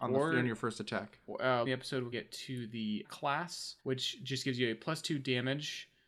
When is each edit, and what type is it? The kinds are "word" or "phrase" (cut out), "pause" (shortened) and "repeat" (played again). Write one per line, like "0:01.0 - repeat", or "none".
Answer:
0:01.7 - phrase
0:02.1 - word
0:03.0 - phrase
0:03.8 - pause